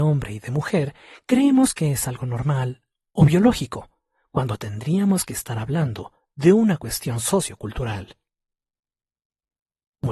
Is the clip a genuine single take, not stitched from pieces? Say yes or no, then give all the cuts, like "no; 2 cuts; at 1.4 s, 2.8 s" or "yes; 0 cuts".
yes; 0 cuts